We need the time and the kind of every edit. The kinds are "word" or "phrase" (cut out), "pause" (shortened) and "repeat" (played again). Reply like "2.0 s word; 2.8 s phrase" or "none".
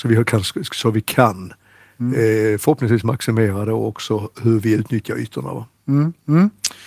none